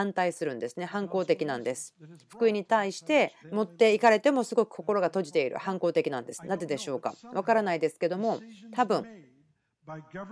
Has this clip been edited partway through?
yes; 1 cut; at 3.4 s

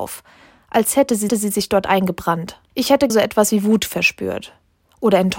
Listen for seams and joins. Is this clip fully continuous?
no; 3 cuts; at 1.3 s, 2.7 s, 3.1 s

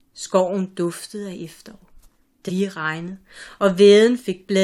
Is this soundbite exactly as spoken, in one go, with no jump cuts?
no; 1 cut; at 2.5 s

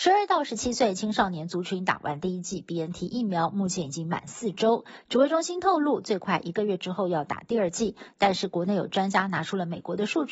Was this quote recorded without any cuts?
yes; 0 cuts

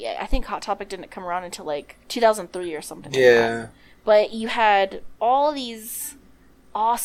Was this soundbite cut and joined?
yes; 1 cut; at 2.0 s

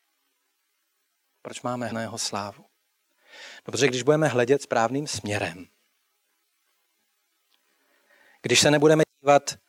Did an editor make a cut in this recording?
yes; 1 cut; at 1.9 s

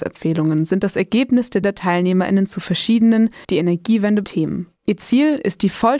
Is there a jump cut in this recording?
yes; 4 cuts; at 1.6 s, 3.4 s, 4.2 s, 4.8 s

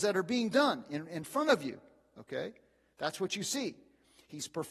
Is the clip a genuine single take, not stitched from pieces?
yes; 0 cuts

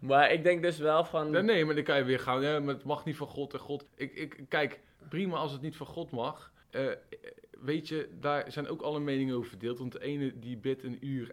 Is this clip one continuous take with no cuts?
no; 2 cuts; at 3.9 s, 6.6 s

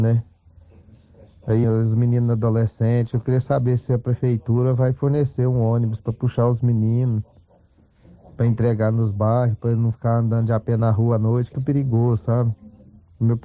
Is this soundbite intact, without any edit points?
no; 2 cuts; at 1.6 s, 11.5 s

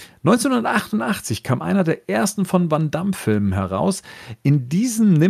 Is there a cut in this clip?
no; 0 cuts

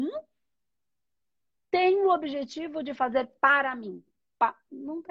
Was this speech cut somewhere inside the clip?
no; 0 cuts

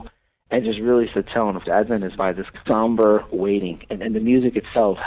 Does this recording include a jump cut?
yes; 4 cuts; at 1.1 s, 1.6 s, 2.2 s, 2.6 s

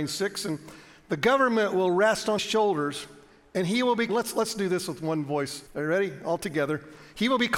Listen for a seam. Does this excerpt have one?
yes; 3 cuts; at 2.4 s, 4.1 s, 5.7 s

